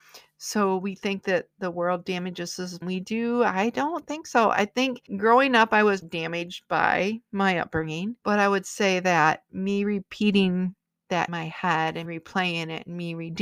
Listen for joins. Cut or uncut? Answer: cut